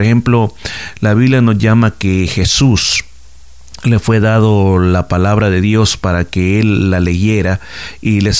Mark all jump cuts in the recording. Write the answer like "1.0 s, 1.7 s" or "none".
none